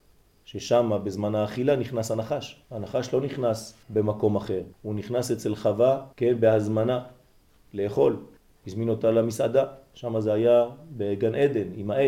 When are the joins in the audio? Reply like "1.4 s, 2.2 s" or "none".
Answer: 2.6 s, 3.8 s, 4.7 s, 6.1 s, 8.4 s